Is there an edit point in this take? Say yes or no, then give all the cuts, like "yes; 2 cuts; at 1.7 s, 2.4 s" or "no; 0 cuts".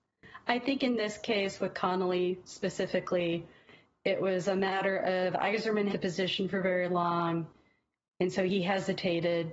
yes; 1 cut; at 5.9 s